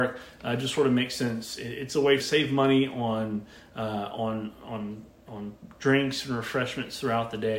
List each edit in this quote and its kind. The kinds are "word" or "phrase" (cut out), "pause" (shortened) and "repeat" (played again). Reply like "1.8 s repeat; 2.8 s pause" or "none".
2.2 s phrase